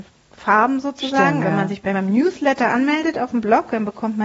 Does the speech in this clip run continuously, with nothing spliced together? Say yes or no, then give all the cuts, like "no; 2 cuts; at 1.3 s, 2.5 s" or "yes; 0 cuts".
no; 2 cuts; at 1.4 s, 1.9 s